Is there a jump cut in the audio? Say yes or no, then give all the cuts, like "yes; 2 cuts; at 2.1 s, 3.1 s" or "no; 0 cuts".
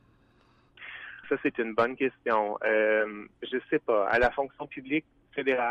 yes; 1 cut; at 1.2 s